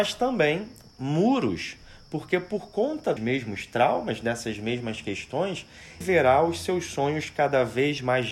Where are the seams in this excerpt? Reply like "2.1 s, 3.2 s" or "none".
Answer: 3.2 s, 6.0 s